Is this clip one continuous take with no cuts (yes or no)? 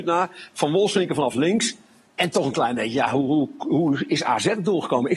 yes